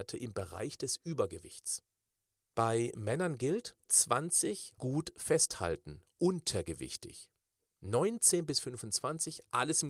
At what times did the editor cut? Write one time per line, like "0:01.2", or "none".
0:03.9
0:04.8